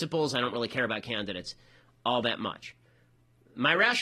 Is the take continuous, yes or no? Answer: yes